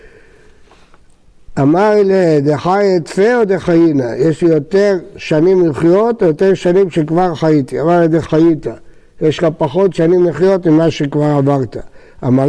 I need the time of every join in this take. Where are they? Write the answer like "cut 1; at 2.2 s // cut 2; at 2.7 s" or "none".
none